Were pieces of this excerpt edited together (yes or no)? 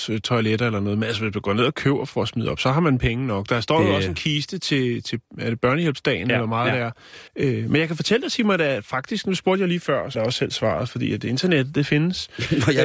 yes